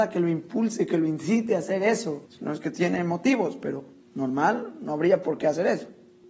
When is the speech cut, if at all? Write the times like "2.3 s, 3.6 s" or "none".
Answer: 2.3 s, 4.0 s